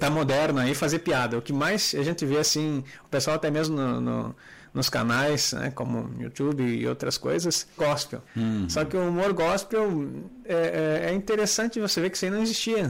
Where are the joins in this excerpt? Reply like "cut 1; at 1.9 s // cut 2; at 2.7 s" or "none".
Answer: cut 1; at 7.8 s // cut 2; at 8.3 s